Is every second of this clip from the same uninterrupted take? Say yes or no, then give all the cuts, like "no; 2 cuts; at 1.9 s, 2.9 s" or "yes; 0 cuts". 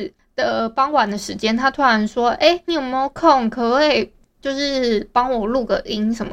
no; 1 cut; at 2.7 s